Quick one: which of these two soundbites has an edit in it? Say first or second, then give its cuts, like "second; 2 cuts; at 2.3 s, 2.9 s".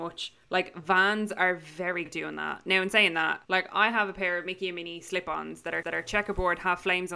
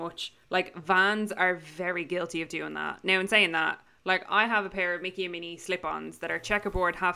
first; 3 cuts; at 2.1 s, 3.4 s, 5.8 s